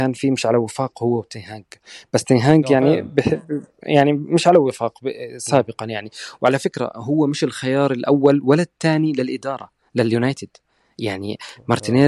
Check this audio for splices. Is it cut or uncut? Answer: uncut